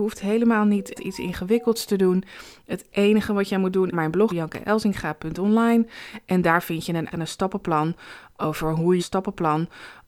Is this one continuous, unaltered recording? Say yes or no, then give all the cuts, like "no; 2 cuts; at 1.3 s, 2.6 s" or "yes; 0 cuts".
no; 5 cuts; at 0.9 s, 3.9 s, 4.3 s, 7.1 s, 9.0 s